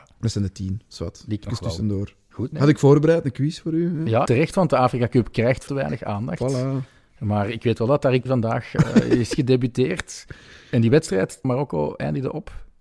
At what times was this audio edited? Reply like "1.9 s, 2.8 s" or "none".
1.4 s, 2.5 s, 4.3 s, 5.7 s, 8.3 s, 11.4 s